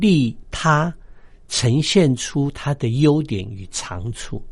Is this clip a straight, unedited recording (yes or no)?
yes